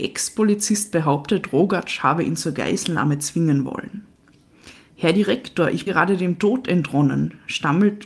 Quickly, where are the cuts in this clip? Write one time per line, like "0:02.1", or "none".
0:05.9